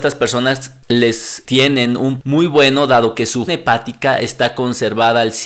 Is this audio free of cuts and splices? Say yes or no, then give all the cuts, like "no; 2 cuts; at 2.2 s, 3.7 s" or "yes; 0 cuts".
no; 3 cuts; at 1.4 s, 2.2 s, 3.5 s